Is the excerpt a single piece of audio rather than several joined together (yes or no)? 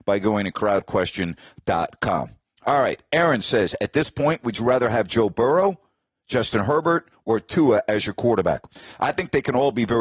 yes